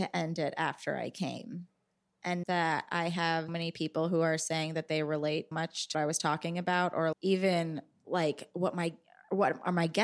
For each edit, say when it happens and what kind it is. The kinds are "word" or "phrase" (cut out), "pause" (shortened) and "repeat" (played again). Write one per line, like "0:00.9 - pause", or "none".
0:02.4 - word
0:03.5 - word
0:05.5 - word
0:05.9 - word
0:07.1 - word